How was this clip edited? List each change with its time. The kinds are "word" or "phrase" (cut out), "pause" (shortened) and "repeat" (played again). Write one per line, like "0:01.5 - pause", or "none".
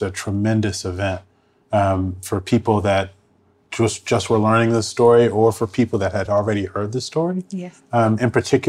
none